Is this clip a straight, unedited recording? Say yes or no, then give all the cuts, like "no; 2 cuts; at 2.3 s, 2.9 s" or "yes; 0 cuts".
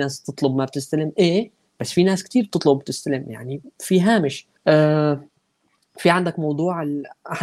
no; 1 cut; at 4.6 s